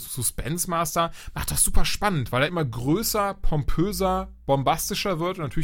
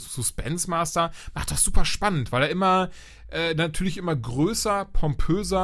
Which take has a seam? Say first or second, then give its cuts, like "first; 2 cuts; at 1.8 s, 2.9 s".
first; 1 cut; at 2.5 s